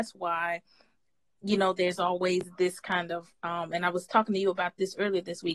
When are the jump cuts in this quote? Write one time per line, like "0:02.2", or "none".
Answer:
none